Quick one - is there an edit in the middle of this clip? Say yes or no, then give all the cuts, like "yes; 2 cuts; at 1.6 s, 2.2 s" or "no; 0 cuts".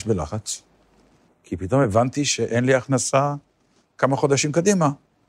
no; 0 cuts